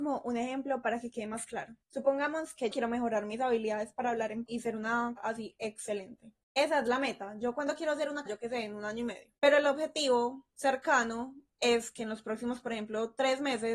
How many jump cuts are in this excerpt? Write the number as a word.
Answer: seven